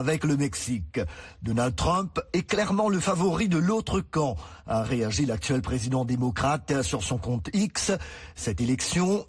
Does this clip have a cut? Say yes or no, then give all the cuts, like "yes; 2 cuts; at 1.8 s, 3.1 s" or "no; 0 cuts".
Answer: no; 0 cuts